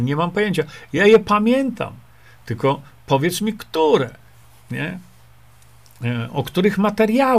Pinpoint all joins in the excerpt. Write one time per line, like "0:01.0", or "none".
none